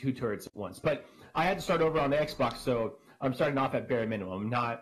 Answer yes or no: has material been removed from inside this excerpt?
no